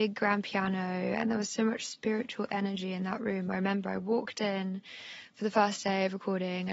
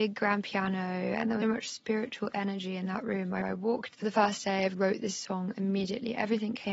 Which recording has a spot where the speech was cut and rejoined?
second; 4 cuts; at 1.4 s, 3.4 s, 3.9 s, 4.7 s

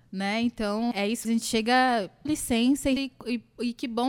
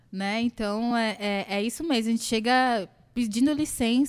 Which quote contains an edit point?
first; 4 cuts; at 0.9 s, 1.2 s, 2.3 s, 3.0 s

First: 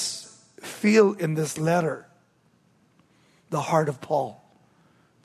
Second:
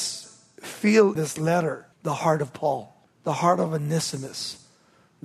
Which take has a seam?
second; 3 cuts; at 1.2 s, 1.9 s, 3.1 s

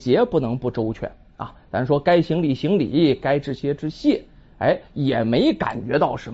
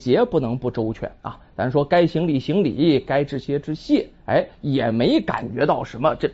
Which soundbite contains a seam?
second; 2 cuts; at 1.2 s, 4.2 s

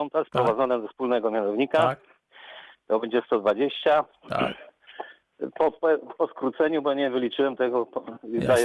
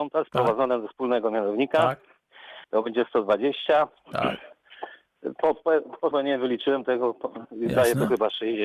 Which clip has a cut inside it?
second; 2 cuts; at 2.6 s, 6.1 s

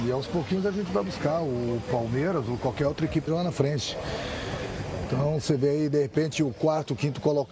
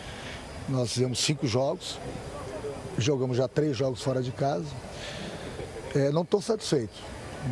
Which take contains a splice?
first; 1 cut; at 3.3 s

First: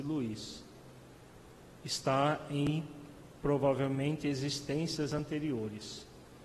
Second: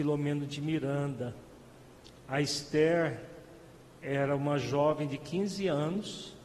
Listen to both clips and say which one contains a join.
first; 1 cut; at 3.3 s

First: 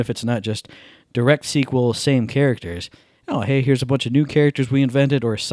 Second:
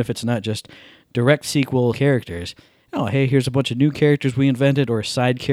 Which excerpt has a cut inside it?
second; 1 cut; at 1.9 s

